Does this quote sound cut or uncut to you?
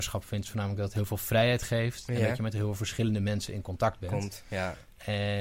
uncut